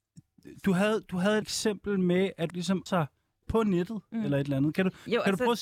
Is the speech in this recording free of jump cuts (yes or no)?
no